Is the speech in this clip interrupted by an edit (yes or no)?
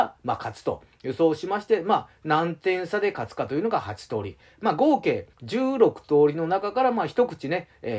yes